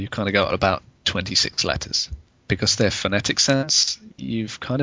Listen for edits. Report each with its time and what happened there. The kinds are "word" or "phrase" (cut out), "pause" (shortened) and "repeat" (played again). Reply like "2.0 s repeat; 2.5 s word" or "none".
none